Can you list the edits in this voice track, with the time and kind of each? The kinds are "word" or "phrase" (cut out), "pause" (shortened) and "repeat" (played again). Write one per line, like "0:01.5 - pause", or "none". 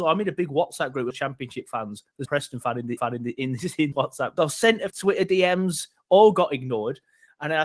0:01.1 - word
0:02.3 - phrase
0:03.0 - repeat
0:03.9 - word
0:04.4 - phrase
0:04.9 - word